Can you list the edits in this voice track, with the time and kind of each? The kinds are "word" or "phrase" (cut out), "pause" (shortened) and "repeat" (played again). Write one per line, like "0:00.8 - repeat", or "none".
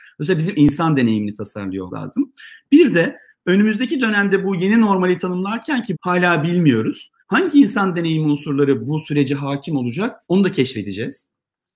0:01.9 - word
0:05.9 - word
0:07.2 - pause
0:10.2 - pause